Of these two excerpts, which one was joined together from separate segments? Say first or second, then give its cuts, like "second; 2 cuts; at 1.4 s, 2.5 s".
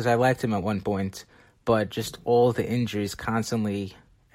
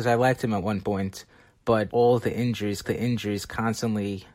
second; 2 cuts; at 1.9 s, 2.8 s